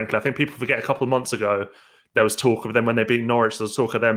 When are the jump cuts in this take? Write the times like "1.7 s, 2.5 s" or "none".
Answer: none